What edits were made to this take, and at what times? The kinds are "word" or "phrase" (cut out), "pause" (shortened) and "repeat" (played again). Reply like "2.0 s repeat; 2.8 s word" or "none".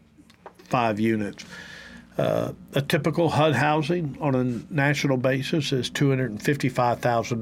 none